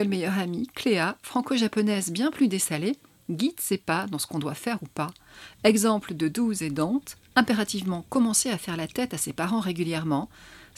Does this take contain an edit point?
no; 0 cuts

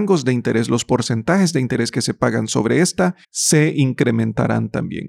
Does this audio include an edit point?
yes; 1 cut; at 3.2 s

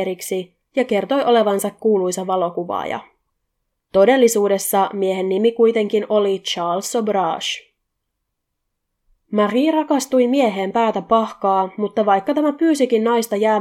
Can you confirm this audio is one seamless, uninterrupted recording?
yes; 0 cuts

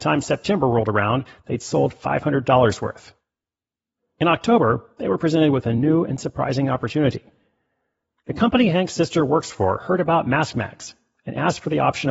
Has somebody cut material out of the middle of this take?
no; 0 cuts

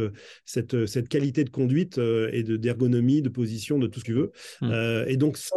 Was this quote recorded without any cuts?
no; 1 cut; at 4.0 s

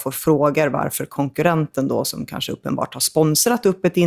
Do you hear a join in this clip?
no; 0 cuts

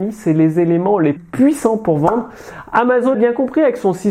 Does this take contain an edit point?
yes; 2 cuts; at 1.2 s, 3.1 s

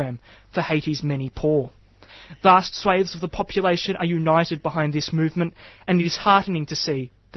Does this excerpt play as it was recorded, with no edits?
yes; 0 cuts

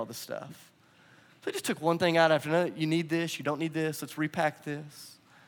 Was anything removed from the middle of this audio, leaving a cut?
no; 0 cuts

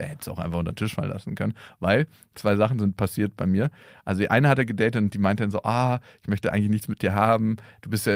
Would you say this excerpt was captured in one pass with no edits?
yes; 0 cuts

